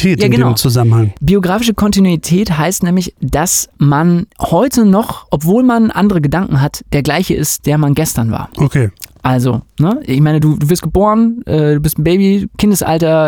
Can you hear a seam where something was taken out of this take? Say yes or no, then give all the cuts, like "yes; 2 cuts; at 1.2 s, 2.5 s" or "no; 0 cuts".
no; 0 cuts